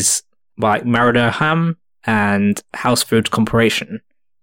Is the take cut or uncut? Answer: uncut